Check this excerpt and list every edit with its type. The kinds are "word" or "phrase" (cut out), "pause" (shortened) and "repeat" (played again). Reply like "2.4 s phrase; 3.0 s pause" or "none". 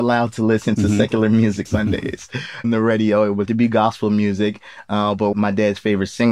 1.7 s word; 2.6 s word; 3.5 s word; 5.3 s phrase